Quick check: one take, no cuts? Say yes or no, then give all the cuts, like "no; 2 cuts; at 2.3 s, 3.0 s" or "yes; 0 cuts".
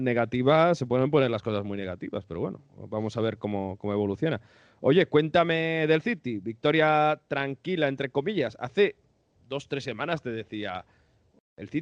yes; 0 cuts